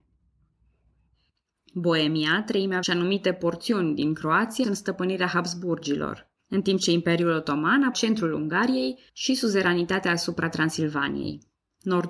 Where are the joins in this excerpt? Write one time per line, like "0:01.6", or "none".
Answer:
0:02.8
0:04.6
0:06.4
0:07.9
0:09.1